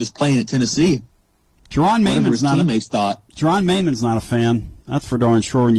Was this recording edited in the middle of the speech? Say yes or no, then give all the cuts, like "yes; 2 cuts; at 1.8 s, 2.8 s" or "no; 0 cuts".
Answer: no; 0 cuts